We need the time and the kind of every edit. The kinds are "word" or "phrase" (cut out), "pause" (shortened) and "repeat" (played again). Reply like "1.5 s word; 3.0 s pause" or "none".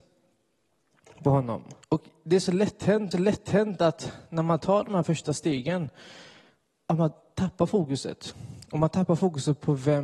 1.8 s pause; 3.1 s repeat